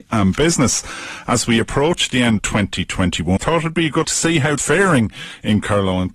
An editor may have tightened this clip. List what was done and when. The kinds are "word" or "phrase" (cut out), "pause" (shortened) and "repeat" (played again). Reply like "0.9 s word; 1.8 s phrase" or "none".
2.4 s word; 3.4 s word; 4.0 s word; 4.6 s phrase